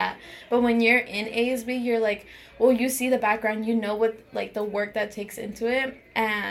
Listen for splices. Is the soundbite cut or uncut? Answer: uncut